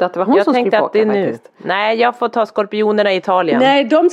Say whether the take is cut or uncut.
uncut